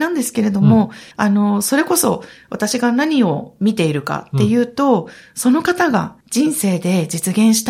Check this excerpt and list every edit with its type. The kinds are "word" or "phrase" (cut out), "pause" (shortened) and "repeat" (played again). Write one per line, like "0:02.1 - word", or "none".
0:01.1 - pause
0:06.2 - pause